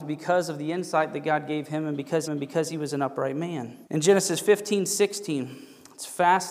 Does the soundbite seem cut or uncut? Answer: cut